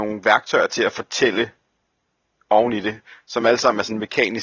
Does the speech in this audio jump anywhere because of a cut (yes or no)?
no